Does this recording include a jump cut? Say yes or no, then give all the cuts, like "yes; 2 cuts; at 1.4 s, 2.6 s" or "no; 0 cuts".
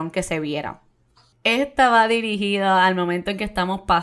no; 0 cuts